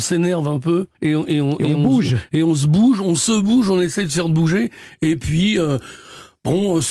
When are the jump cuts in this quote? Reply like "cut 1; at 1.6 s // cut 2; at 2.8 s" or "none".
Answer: cut 1; at 0.9 s

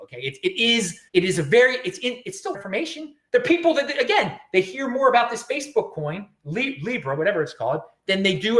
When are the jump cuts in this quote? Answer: cut 1; at 1.1 s // cut 2; at 2.5 s

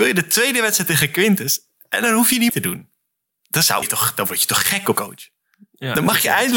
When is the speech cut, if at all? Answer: cut 1; at 2.5 s // cut 2; at 3.8 s // cut 3; at 5.0 s

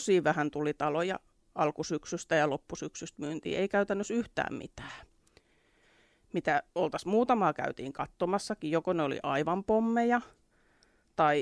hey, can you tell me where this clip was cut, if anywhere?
none

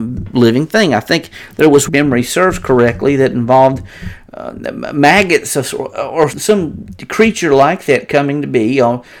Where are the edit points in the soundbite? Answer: cut 1; at 1.9 s // cut 2; at 6.3 s

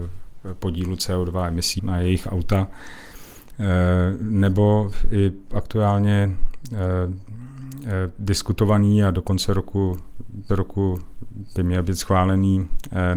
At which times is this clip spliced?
cut 1; at 1.8 s // cut 2; at 10.5 s

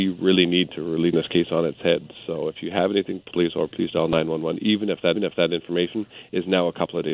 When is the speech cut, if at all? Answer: cut 1; at 1.1 s // cut 2; at 3.3 s // cut 3; at 5.2 s

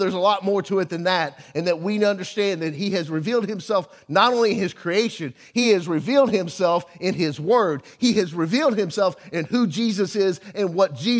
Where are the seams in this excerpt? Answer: none

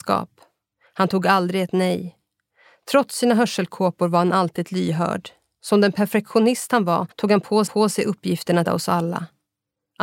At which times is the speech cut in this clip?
cut 1; at 7.1 s // cut 2; at 7.7 s // cut 3; at 8.7 s

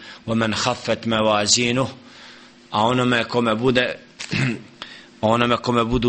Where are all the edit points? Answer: none

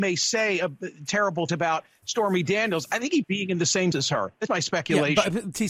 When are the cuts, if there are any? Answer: cut 1; at 1.5 s // cut 2; at 3.2 s // cut 3; at 3.9 s // cut 4; at 4.5 s

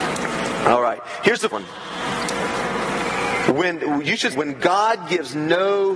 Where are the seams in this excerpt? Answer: cut 1; at 1.5 s // cut 2; at 4.3 s

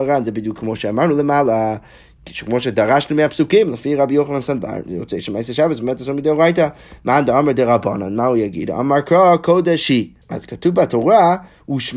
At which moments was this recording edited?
cut 1; at 10.2 s

